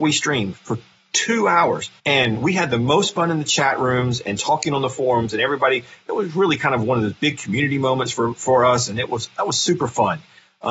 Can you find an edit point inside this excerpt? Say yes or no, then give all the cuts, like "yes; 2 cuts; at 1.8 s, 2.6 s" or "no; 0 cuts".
yes; 1 cut; at 2.0 s